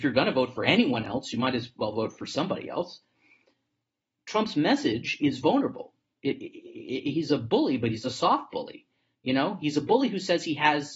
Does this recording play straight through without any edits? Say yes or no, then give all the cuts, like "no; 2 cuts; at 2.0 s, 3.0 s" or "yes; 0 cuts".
yes; 0 cuts